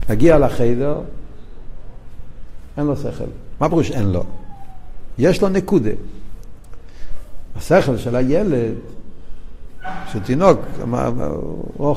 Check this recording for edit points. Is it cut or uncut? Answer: uncut